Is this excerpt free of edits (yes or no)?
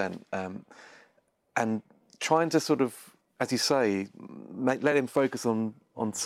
yes